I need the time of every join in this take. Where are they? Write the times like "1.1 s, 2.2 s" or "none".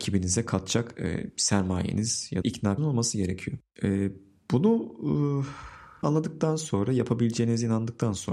2.4 s, 2.8 s, 6.0 s

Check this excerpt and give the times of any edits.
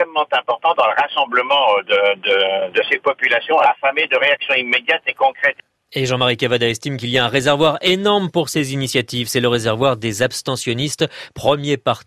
none

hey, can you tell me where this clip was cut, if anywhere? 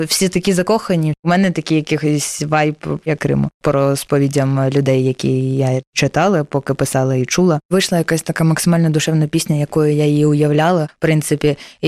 3.2 s

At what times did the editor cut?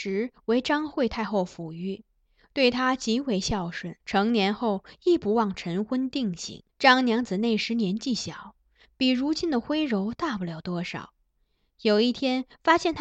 4.0 s, 6.7 s

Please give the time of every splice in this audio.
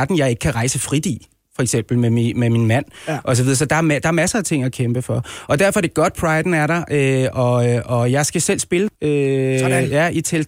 none

